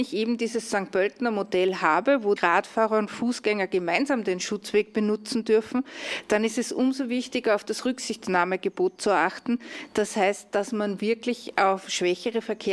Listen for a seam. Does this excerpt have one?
yes; 1 cut; at 2.4 s

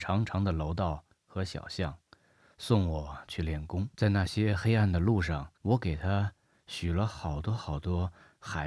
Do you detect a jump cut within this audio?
yes; 2 cuts; at 3.9 s, 5.6 s

